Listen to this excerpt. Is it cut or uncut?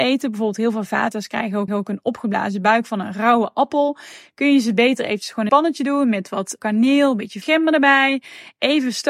cut